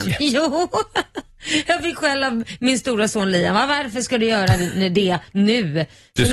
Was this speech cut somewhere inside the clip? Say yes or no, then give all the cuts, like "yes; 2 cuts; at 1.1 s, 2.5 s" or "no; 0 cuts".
no; 0 cuts